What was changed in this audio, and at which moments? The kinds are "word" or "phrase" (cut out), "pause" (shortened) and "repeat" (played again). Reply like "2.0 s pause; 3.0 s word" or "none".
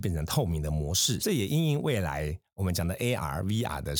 1.2 s word